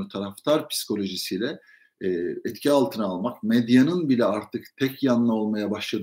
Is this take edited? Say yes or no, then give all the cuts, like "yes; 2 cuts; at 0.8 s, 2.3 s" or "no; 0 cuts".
no; 0 cuts